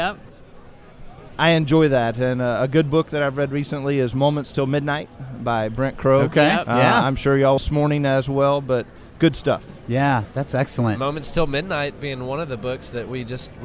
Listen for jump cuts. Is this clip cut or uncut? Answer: cut